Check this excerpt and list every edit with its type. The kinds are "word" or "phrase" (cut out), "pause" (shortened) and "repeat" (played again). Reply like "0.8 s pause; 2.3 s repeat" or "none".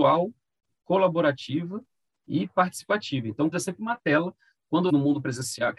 3.5 s word; 4.9 s word